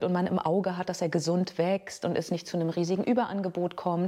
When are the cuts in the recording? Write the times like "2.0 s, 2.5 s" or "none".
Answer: none